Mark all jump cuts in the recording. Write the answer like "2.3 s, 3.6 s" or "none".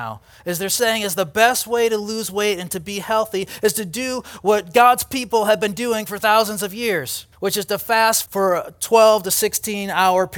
7.3 s, 8.3 s